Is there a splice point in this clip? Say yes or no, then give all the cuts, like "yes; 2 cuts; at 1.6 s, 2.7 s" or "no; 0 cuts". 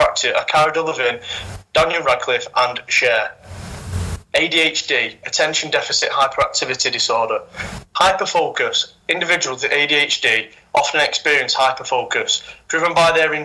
no; 0 cuts